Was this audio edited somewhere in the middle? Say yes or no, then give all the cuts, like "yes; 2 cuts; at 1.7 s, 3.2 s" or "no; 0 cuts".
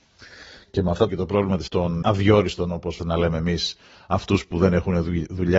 yes; 4 cuts; at 1.1 s, 1.7 s, 2.0 s, 3.0 s